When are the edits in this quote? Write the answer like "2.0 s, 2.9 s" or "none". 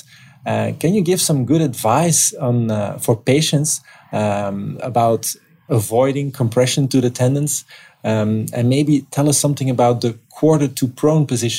none